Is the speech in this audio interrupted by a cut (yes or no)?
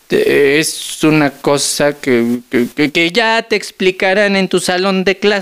no